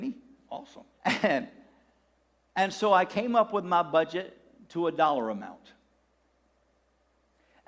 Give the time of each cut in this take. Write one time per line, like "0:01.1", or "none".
0:00.9